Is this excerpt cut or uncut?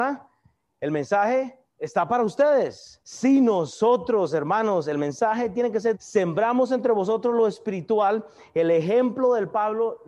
cut